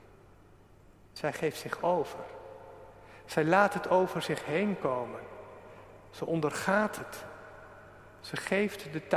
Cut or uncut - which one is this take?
uncut